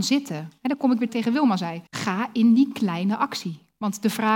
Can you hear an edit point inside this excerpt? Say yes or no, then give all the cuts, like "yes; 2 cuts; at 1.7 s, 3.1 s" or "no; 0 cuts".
yes; 2 cuts; at 1.1 s, 1.9 s